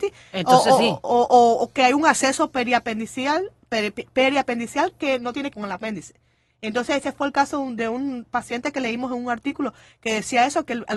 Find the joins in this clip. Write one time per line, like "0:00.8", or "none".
0:05.5